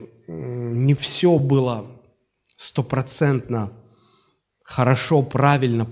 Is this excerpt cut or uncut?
uncut